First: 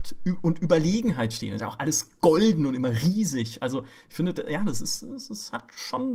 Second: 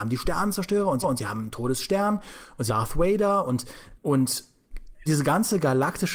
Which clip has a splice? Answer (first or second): second